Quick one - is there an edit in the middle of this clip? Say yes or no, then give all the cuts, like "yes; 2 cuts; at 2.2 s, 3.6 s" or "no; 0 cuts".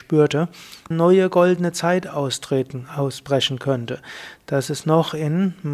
yes; 1 cut; at 0.9 s